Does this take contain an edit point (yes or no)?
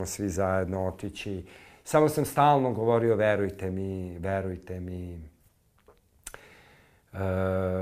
no